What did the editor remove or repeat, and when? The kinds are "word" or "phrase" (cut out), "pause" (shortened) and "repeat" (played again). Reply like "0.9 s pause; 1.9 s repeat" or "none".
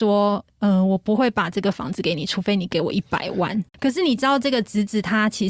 3.7 s pause